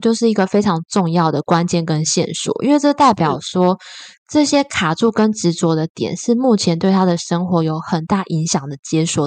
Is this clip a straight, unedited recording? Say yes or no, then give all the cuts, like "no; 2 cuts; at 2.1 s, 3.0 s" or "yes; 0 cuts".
yes; 0 cuts